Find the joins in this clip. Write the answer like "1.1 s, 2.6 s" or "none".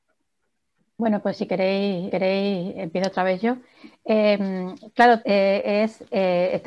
2.1 s, 5.2 s